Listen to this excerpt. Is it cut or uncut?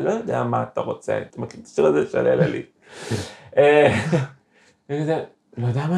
cut